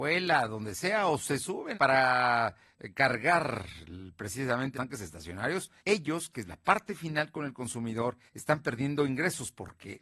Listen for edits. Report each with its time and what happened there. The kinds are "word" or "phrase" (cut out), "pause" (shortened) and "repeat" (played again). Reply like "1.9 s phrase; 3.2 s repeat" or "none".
1.7 s word; 4.7 s word; 5.8 s pause; 8.3 s pause

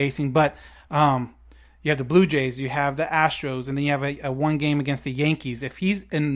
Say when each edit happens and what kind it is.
none

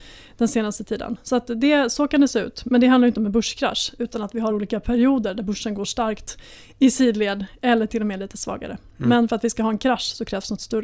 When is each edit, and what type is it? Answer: none

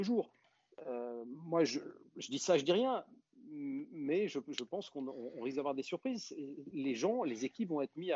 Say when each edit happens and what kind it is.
none

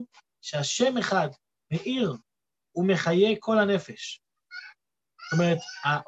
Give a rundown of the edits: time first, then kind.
none

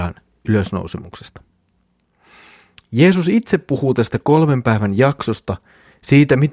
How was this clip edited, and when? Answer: none

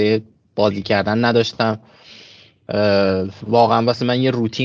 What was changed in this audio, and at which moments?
3.4 s word

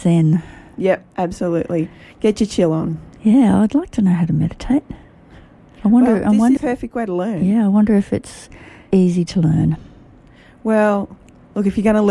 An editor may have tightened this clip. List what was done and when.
6.6 s phrase; 8.9 s phrase

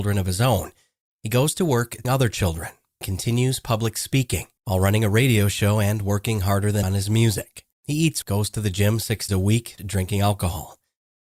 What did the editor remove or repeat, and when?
2.0 s word; 3.0 s word; 4.6 s pause; 6.8 s word; 7.7 s pause; 8.2 s word; 9.3 s word; 9.8 s phrase

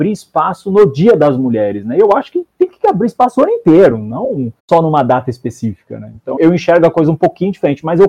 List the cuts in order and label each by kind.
4.6 s pause; 6.4 s word

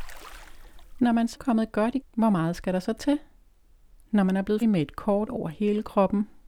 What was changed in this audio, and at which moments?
1.4 s word; 2.0 s word; 4.6 s word; 5.3 s word

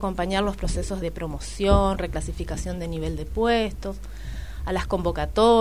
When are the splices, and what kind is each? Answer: 1.0 s word

